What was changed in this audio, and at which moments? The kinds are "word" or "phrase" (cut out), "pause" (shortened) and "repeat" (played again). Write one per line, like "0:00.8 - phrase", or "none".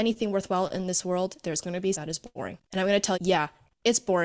0:01.9 - word
0:02.6 - pause
0:03.1 - word